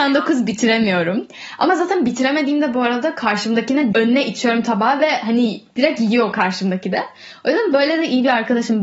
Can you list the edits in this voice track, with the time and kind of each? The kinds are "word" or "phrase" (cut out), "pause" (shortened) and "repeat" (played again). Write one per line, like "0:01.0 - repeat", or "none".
0:03.9 - word
0:05.7 - pause